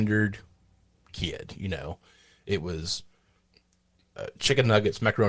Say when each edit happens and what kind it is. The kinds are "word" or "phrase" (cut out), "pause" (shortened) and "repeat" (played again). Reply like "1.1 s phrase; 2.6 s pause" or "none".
none